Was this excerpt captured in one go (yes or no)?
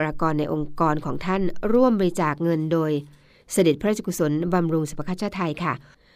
yes